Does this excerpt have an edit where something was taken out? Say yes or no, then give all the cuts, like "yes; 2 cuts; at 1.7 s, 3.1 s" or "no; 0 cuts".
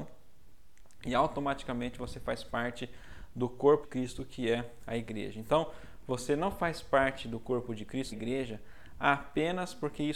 yes; 2 cuts; at 3.8 s, 8.1 s